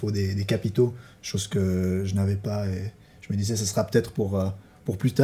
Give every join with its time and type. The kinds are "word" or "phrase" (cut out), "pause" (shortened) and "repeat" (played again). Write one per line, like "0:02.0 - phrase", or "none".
none